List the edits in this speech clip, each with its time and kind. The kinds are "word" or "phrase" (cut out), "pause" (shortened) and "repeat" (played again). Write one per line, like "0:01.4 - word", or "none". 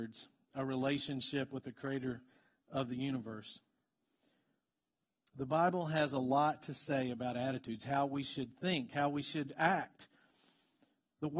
none